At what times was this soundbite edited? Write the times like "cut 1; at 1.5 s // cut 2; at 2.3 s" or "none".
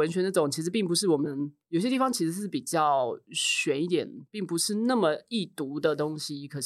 cut 1; at 1.6 s